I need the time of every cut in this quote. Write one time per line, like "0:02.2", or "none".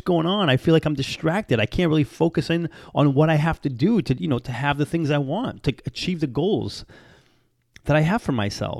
none